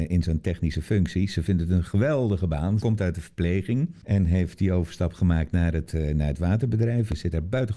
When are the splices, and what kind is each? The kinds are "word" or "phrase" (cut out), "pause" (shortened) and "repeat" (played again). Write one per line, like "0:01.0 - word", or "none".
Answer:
none